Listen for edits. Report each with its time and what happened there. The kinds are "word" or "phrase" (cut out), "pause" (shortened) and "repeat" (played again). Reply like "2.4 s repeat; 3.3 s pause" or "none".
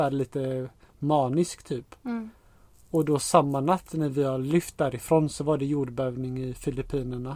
none